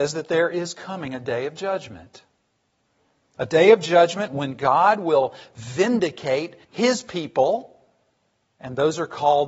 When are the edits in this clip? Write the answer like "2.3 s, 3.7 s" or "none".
6.6 s